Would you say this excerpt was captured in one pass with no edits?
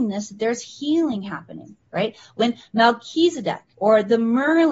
no; 2 cuts; at 1.9 s, 3.7 s

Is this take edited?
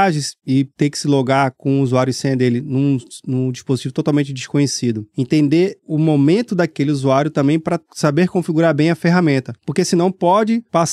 no; 0 cuts

